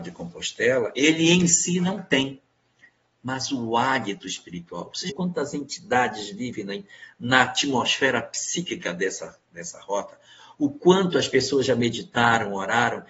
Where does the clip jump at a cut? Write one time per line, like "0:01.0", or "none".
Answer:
0:05.1